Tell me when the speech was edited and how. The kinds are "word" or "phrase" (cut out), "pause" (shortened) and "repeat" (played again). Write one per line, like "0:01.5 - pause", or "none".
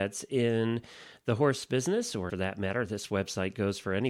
0:02.3 - phrase